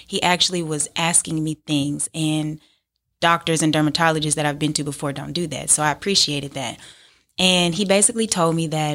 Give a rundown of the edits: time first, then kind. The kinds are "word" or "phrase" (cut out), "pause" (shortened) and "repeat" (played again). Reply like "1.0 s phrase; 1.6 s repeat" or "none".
none